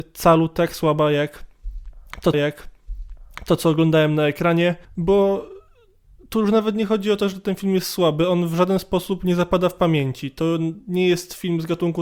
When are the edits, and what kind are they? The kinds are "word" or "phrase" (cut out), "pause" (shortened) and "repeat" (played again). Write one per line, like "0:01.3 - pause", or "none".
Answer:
0:02.3 - repeat
0:04.8 - pause